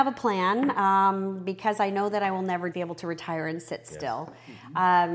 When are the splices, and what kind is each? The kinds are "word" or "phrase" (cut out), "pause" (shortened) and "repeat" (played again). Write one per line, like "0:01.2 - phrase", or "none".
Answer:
0:02.7 - word

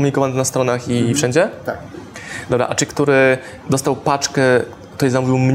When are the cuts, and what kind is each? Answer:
0:02.9 - word

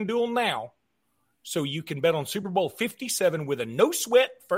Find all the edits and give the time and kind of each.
none

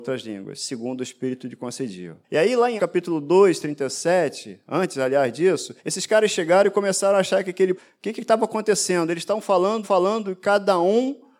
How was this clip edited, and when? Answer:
0:02.2 - pause
0:02.8 - word
0:05.8 - pause
0:07.8 - word
0:09.8 - repeat

